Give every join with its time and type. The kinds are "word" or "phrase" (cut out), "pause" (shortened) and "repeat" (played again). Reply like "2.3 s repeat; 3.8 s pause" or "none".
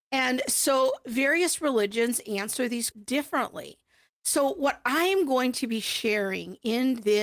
2.9 s word